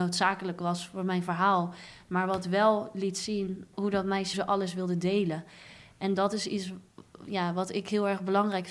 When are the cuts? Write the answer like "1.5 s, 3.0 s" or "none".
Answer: 3.7 s, 4.3 s